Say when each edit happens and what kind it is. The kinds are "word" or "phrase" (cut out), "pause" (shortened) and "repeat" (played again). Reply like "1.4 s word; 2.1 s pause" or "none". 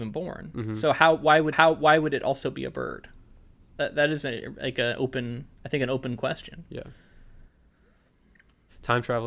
1.5 s repeat